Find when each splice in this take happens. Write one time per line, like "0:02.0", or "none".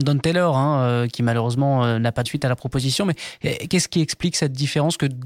0:02.2